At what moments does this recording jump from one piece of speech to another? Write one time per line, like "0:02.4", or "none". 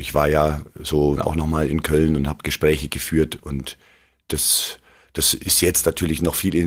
0:01.2